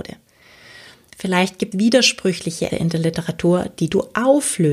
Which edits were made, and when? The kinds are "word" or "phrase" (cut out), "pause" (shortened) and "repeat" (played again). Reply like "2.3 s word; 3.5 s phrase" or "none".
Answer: 1.7 s word; 2.7 s word